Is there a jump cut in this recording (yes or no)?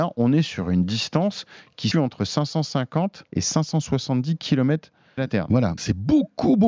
yes